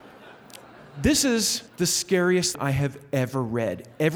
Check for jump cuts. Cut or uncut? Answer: cut